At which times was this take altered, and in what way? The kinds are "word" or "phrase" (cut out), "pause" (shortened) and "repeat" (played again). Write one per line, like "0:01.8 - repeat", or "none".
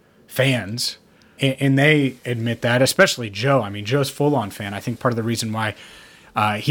0:01.4 - word
0:02.2 - pause
0:05.0 - word